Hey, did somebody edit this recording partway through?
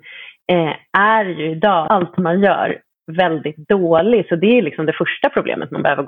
yes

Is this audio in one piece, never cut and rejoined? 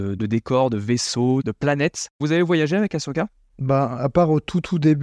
yes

